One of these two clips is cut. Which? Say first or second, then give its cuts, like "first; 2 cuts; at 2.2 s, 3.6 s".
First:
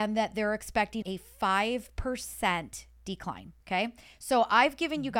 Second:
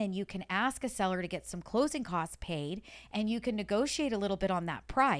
first; 2 cuts; at 1.0 s, 3.6 s